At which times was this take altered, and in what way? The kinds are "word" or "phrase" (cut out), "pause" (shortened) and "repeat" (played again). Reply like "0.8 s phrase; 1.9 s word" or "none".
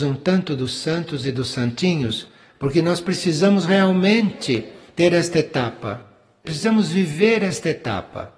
none